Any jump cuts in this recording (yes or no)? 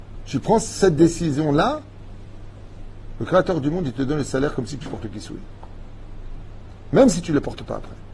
no